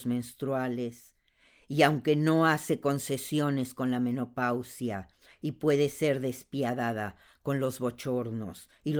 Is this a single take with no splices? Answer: yes; 0 cuts

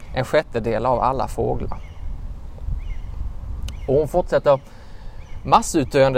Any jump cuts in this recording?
no; 0 cuts

